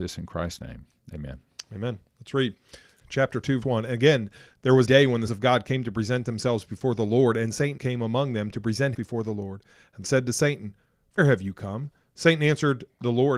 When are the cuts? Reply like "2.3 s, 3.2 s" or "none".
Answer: 3.0 s, 3.6 s, 4.8 s, 5.3 s, 7.8 s, 8.9 s, 10.0 s, 11.2 s